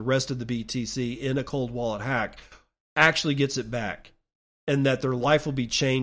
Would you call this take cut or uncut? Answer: uncut